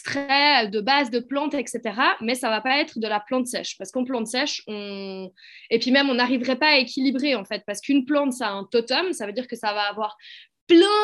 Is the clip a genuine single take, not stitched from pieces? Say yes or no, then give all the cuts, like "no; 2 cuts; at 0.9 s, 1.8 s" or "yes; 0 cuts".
yes; 0 cuts